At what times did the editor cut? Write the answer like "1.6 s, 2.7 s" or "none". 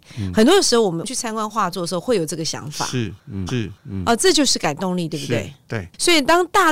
3.5 s